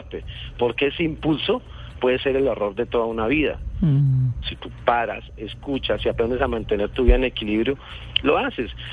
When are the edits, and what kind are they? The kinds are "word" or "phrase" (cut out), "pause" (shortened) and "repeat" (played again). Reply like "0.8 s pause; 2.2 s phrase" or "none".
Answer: none